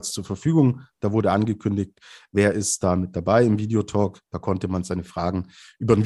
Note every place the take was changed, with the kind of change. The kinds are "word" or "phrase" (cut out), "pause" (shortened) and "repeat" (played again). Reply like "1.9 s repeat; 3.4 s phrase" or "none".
none